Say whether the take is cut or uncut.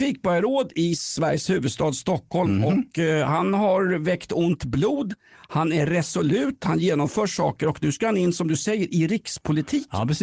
uncut